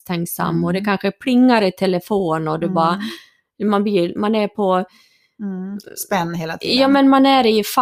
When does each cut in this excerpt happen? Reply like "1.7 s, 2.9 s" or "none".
none